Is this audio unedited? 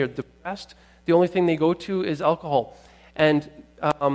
yes; 0 cuts

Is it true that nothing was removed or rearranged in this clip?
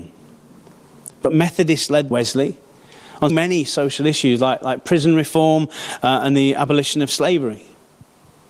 no; 3 cuts; at 1.1 s, 2.1 s, 3.3 s

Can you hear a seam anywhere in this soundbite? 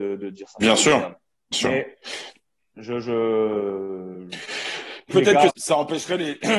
yes; 3 cuts; at 1.5 s, 5.1 s, 5.5 s

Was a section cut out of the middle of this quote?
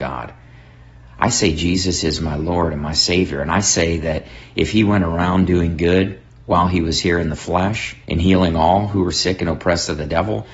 yes; 1 cut; at 8.0 s

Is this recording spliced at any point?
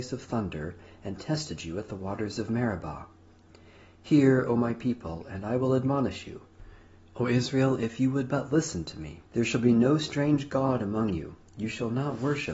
yes; 1 cut; at 9.3 s

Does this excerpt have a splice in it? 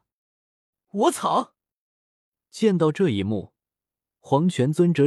no; 0 cuts

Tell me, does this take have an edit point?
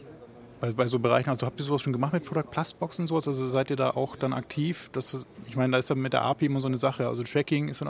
no; 0 cuts

